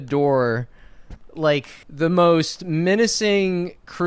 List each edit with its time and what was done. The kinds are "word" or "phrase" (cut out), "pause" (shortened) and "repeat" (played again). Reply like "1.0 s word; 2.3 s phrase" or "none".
1.8 s pause